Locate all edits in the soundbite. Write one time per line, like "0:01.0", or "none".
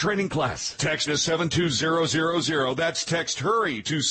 0:01.1